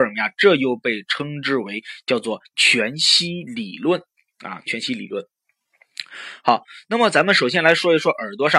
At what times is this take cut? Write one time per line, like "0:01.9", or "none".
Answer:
none